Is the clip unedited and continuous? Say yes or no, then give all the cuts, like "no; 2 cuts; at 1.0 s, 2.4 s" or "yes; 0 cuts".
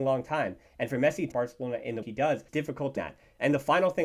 no; 4 cuts; at 1.3 s, 2.0 s, 2.5 s, 3.0 s